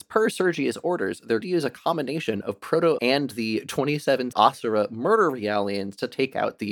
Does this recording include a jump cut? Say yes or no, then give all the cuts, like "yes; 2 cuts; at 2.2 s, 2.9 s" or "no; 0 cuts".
yes; 3 cuts; at 1.4 s, 3.0 s, 4.3 s